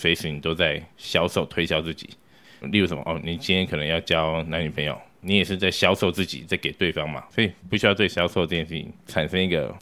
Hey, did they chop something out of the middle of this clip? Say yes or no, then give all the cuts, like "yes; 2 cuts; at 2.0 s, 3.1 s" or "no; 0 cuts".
yes; 2 cuts; at 0.9 s, 2.6 s